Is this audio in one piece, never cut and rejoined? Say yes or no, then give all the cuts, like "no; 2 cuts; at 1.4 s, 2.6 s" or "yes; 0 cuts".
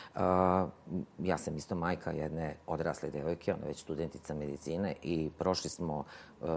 yes; 0 cuts